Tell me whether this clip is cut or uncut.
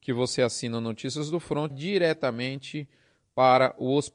cut